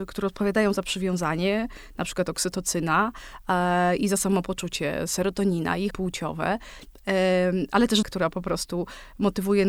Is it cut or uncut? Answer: cut